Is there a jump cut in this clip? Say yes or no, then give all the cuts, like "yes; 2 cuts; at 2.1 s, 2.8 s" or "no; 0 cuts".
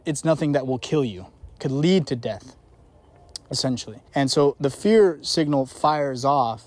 yes; 2 cuts; at 1.6 s, 4.1 s